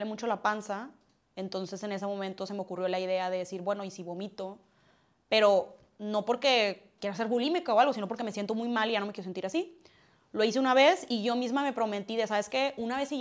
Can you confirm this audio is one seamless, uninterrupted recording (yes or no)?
yes